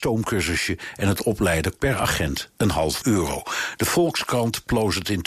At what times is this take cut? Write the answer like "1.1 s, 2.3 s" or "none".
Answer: 1.8 s, 3.0 s